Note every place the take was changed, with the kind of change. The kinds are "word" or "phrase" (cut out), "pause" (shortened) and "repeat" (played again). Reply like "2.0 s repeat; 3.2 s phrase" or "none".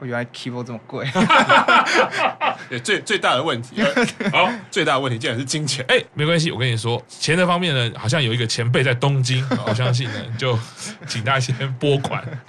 none

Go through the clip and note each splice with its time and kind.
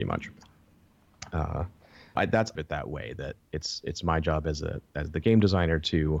2.2 s word; 2.6 s phrase

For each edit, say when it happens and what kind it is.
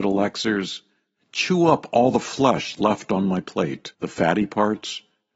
3.9 s pause

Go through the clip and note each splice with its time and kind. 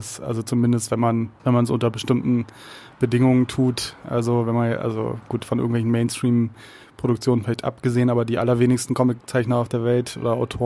1.4 s pause

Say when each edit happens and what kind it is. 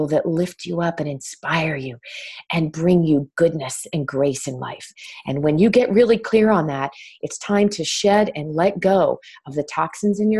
none

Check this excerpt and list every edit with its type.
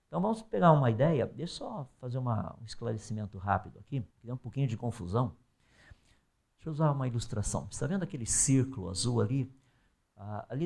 4.1 s pause

